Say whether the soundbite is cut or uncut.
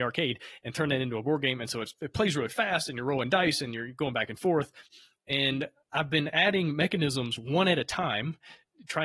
uncut